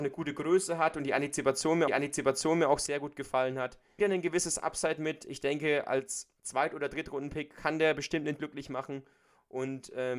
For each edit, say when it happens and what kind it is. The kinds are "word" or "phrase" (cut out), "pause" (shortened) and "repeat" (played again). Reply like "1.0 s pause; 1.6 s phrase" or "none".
1.9 s repeat; 4.0 s word; 6.4 s pause; 8.4 s word